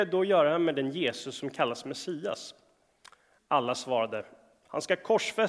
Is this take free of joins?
yes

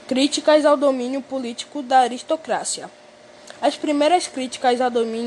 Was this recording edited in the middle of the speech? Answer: no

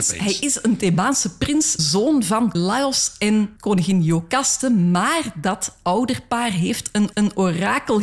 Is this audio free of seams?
no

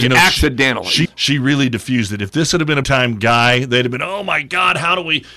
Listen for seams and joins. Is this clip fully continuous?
no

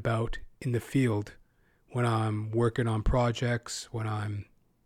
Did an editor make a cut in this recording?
no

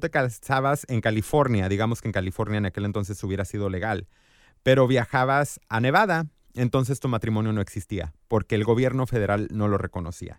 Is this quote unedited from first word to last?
yes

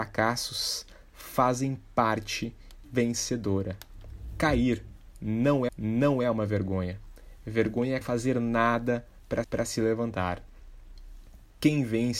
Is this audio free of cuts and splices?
no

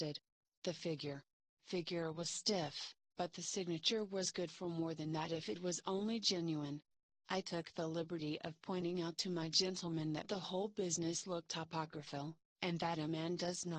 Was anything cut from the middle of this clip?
no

